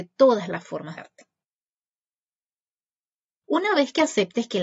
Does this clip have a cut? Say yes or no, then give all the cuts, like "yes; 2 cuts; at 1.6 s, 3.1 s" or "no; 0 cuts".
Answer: yes; 1 cut; at 1.0 s